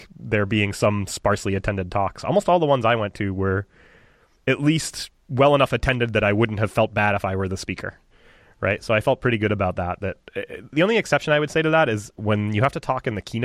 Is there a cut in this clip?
no; 0 cuts

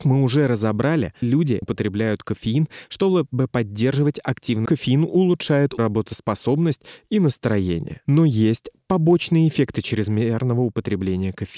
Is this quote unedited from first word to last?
no; 4 cuts; at 1.2 s, 1.6 s, 4.7 s, 5.8 s

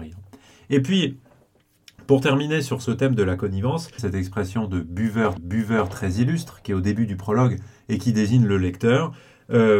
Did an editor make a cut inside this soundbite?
yes; 3 cuts; at 2.8 s, 4.0 s, 5.4 s

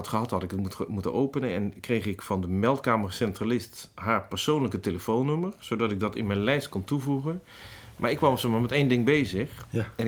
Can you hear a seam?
no; 0 cuts

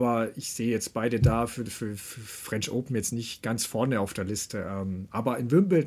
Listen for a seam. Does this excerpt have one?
no; 0 cuts

